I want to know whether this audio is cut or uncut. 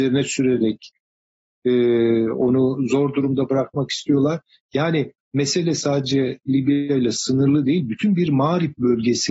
uncut